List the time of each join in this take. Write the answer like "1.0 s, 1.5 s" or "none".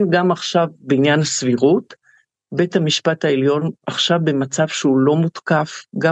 none